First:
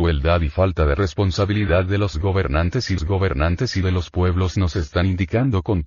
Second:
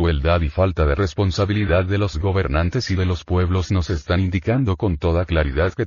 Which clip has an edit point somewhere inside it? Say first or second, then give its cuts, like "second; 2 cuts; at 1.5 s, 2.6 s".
first; 1 cut; at 3.0 s